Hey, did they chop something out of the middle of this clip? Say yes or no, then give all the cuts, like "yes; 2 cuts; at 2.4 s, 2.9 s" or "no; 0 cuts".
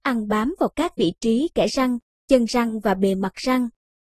no; 0 cuts